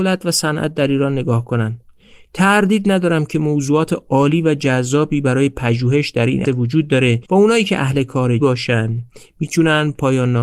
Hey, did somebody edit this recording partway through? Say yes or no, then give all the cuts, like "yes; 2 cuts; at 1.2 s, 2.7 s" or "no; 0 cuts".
yes; 3 cuts; at 6.5 s, 7.3 s, 8.4 s